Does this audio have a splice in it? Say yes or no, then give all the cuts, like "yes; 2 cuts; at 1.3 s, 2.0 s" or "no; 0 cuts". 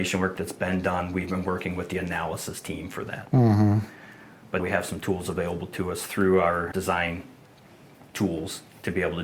yes; 2 cuts; at 4.6 s, 6.7 s